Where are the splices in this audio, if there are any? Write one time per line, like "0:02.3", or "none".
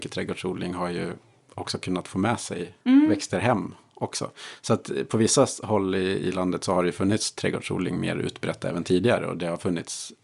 0:01.2
0:02.8